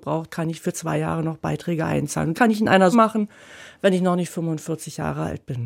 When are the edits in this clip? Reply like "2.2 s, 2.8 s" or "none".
2.3 s, 2.9 s

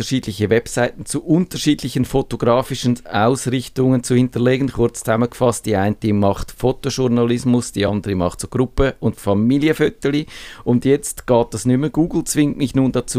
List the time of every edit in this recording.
none

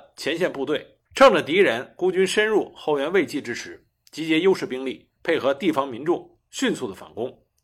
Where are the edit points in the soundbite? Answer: 1.1 s, 5.2 s

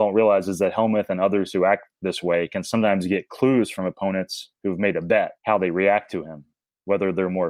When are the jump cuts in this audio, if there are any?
4.5 s, 5.4 s

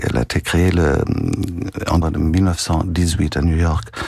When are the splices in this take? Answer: 2.0 s

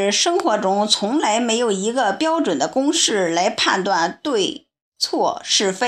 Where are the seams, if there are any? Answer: none

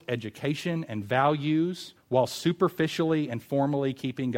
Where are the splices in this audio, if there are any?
2.0 s

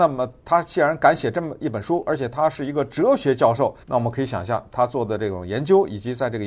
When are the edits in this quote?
3.8 s

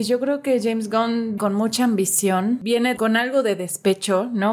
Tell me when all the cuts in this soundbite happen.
1.4 s, 3.0 s

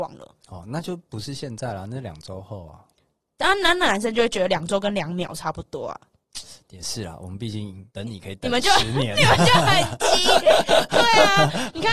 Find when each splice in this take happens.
7.9 s

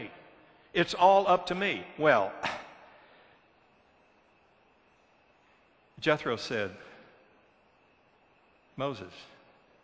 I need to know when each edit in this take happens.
none

